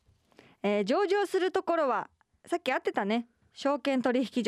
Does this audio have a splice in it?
no; 0 cuts

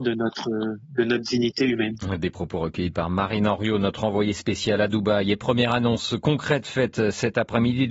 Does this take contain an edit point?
no; 0 cuts

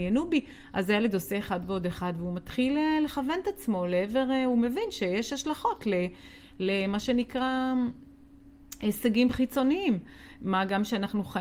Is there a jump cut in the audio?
no; 0 cuts

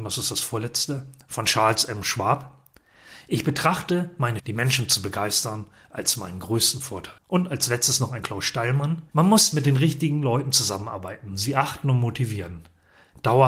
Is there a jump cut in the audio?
yes; 4 cuts; at 4.4 s, 7.2 s, 8.2 s, 9.1 s

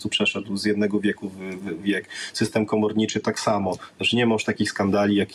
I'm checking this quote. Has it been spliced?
yes; 1 cut; at 1.8 s

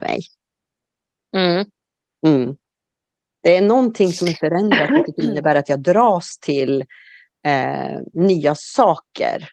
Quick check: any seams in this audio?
no; 0 cuts

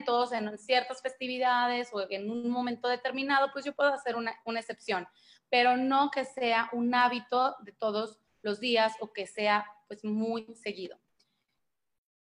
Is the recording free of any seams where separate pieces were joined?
yes; 0 cuts

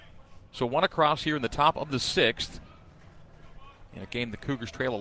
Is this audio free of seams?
yes; 0 cuts

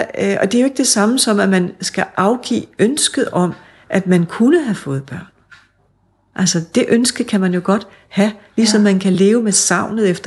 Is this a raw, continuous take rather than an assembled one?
yes; 0 cuts

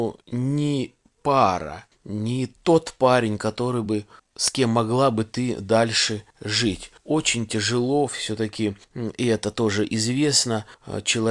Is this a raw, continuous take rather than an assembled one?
yes; 0 cuts

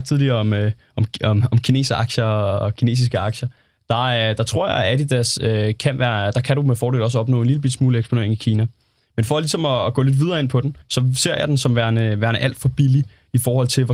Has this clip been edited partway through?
yes; 1 cut; at 10.8 s

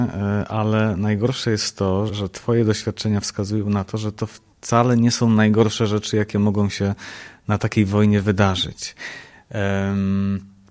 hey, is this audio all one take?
no; 1 cut; at 2.1 s

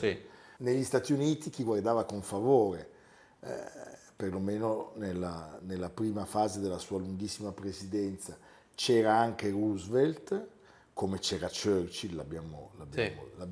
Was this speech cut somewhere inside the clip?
no; 0 cuts

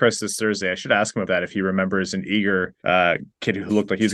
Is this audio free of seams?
no; 2 cuts; at 1.3 s, 2.8 s

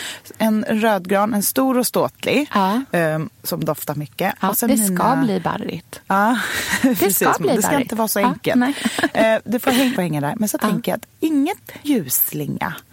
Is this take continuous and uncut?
no; 3 cuts; at 3.4 s, 10.0 s, 11.8 s

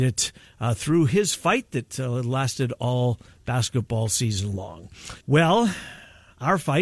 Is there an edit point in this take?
yes; 1 cut; at 5.2 s

